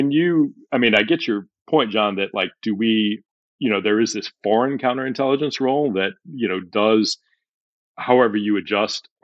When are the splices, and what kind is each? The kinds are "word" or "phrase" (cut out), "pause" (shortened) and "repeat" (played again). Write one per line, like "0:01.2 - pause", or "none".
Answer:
none